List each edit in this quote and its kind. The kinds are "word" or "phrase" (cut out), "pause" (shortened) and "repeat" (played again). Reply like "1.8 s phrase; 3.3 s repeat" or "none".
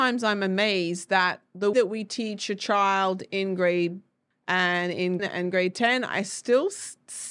1.7 s word; 4.3 s word; 5.2 s phrase

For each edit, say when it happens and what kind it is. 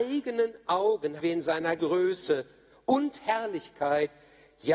1.2 s word; 1.8 s word

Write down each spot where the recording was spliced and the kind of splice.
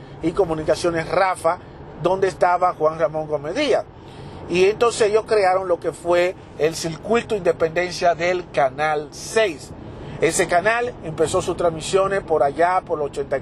none

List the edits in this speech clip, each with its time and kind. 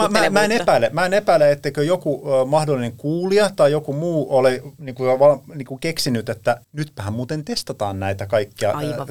6.6 s pause

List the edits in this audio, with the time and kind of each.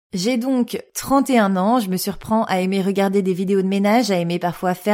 none

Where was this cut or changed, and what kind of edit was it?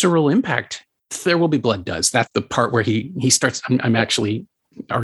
2.3 s phrase

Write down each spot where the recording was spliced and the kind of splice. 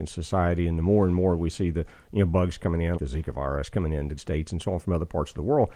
3.0 s word; 4.2 s word

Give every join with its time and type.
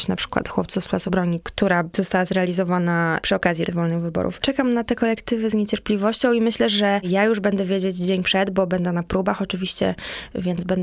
3.7 s word

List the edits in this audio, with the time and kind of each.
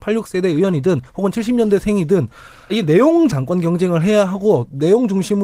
1.1 s pause; 2.7 s word; 3.3 s word

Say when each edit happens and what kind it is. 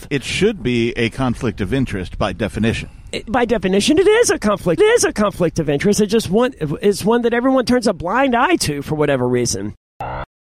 3.3 s word; 4.8 s repeat

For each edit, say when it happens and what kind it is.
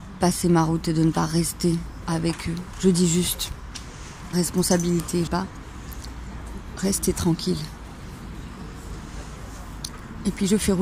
2.0 s word; 4.3 s phrase; 5.3 s phrase

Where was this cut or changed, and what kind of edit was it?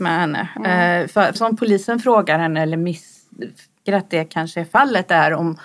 1.4 s word; 3.9 s word

